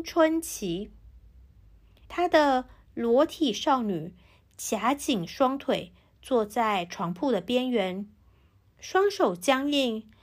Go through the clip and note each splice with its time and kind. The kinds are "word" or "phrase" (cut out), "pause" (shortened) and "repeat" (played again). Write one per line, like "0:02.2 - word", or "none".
0:02.0 - pause

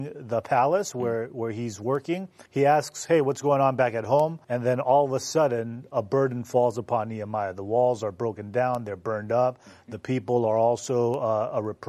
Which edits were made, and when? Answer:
0:02.5 - pause
0:04.4 - pause

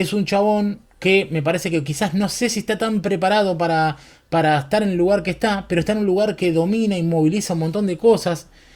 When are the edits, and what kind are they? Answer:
none

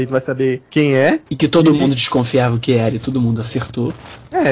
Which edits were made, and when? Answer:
0:01.3 - pause

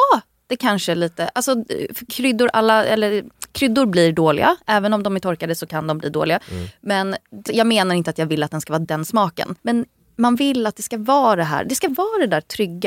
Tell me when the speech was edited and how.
0:07.5 - phrase
0:08.8 - phrase
0:09.6 - pause

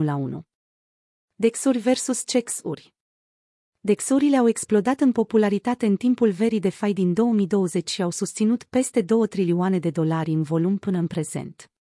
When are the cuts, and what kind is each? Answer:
none

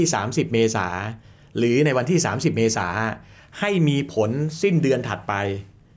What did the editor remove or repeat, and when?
none

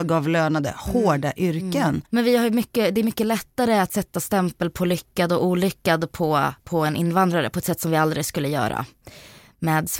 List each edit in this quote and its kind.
0:02.0 - pause

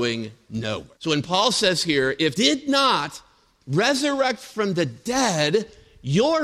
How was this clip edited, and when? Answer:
0:00.9 - pause
0:02.3 - word

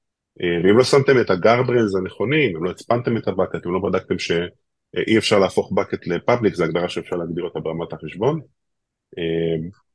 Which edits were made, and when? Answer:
none

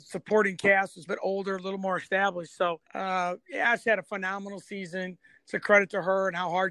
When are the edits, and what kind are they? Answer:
0:01.1 - phrase
0:02.8 - pause

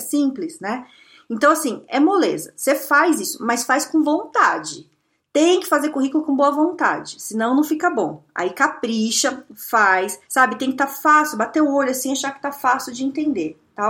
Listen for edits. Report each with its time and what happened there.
0:10.2 - pause

